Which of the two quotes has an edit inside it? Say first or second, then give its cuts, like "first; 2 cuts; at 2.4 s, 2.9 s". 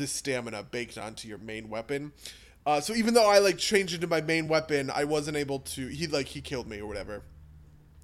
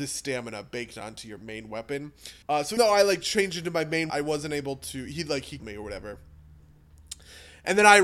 second; 4 cuts; at 2.4 s, 2.8 s, 4.1 s, 5.6 s